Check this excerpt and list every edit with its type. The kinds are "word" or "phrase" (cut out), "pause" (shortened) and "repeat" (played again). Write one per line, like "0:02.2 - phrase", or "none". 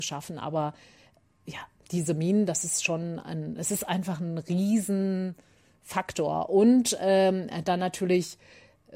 none